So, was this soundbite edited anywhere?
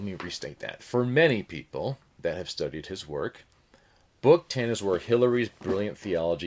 no; 0 cuts

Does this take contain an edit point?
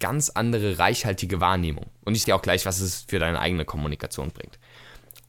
yes; 1 cut; at 2.2 s

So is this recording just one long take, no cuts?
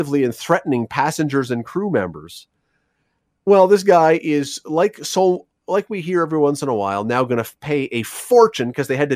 yes; 0 cuts

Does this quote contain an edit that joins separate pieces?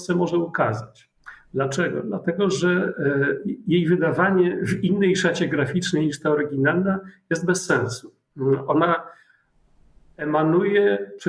no; 0 cuts

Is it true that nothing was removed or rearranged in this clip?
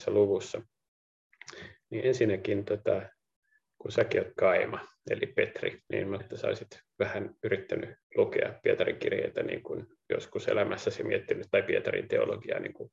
no; 4 cuts; at 4.4 s, 5.8 s, 6.2 s, 8.0 s

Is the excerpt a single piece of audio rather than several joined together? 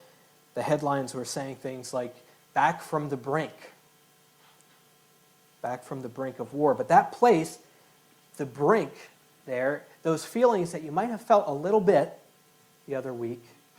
yes; 0 cuts

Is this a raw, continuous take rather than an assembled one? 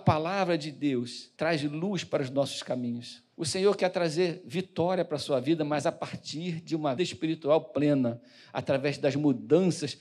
no; 3 cuts; at 1.3 s, 3.3 s, 7.0 s

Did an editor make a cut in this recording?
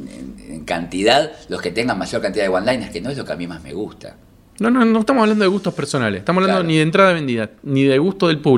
no; 0 cuts

